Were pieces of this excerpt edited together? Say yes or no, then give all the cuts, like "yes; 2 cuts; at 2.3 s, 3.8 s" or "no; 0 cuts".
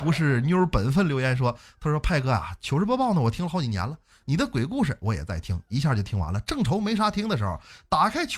no; 0 cuts